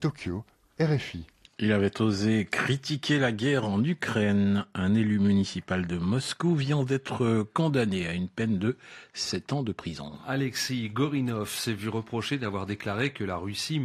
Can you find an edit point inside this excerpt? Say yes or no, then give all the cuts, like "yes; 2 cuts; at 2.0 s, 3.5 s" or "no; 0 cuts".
no; 0 cuts